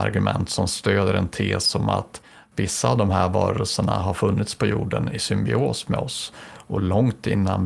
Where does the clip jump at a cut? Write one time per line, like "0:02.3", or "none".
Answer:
none